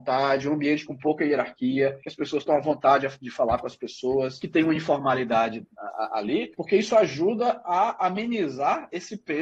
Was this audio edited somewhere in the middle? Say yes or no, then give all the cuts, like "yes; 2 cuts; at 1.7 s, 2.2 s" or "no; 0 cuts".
no; 0 cuts